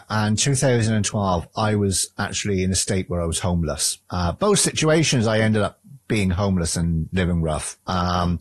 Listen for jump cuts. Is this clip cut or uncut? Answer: cut